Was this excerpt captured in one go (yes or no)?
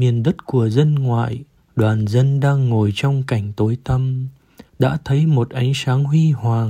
no